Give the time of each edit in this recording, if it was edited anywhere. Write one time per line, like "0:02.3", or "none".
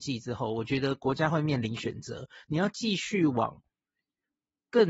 none